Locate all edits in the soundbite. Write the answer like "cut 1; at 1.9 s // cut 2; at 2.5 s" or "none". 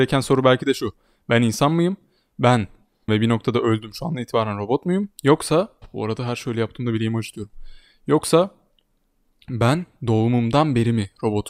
cut 1; at 3.1 s // cut 2; at 5.8 s